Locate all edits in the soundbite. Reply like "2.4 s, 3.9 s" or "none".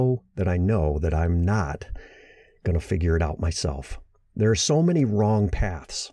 none